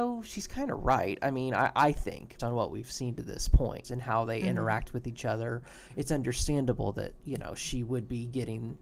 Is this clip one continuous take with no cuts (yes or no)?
no